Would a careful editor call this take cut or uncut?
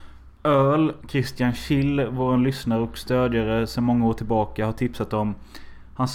cut